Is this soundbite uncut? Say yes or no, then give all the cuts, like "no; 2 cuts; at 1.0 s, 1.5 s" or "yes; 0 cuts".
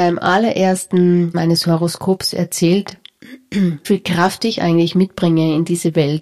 no; 2 cuts; at 1.3 s, 3.8 s